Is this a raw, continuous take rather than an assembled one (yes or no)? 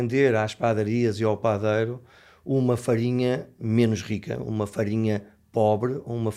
yes